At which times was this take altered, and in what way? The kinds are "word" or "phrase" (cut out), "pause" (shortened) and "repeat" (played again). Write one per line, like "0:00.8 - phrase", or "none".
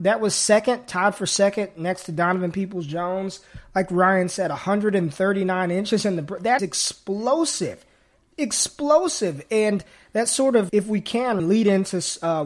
0:06.6 - word
0:10.7 - word
0:11.4 - word